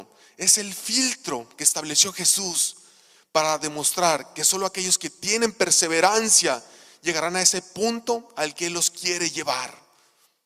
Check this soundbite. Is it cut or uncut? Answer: uncut